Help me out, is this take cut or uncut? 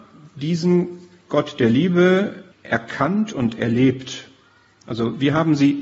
cut